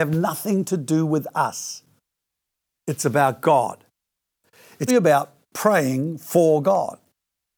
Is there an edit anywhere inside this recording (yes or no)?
yes